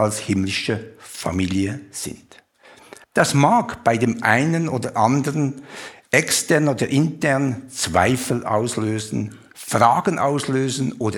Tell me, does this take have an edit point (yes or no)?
yes